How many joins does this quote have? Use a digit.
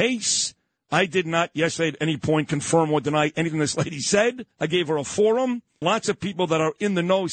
2